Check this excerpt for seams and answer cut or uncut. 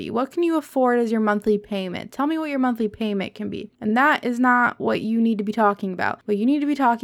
uncut